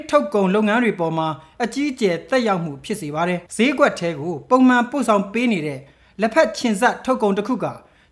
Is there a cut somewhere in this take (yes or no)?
yes